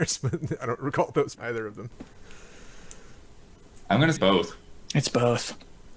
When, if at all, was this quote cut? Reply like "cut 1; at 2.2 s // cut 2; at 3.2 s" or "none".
cut 1; at 1.3 s // cut 2; at 4.2 s